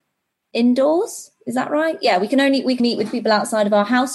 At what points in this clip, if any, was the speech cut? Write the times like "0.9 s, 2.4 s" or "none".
2.8 s